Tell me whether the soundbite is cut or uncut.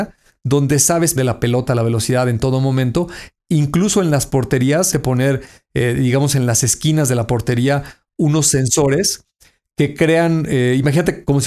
cut